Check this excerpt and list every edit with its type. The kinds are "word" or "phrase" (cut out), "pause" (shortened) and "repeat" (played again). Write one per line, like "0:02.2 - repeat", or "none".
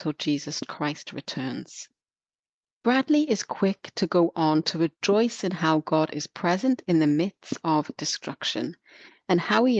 none